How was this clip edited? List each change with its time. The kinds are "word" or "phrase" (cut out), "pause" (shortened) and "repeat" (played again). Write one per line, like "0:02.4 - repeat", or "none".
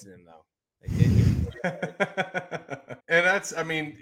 0:03.0 - pause